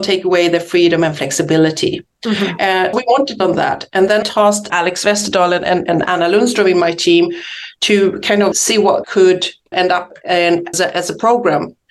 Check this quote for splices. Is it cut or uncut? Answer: cut